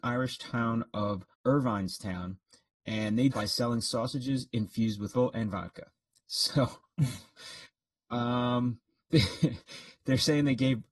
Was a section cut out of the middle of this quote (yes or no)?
yes